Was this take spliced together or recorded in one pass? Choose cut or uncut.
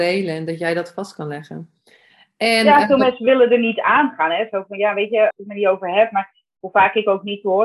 cut